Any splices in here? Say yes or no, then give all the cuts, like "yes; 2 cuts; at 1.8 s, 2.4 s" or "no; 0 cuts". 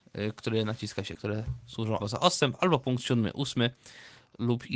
yes; 2 cuts; at 1.1 s, 2.0 s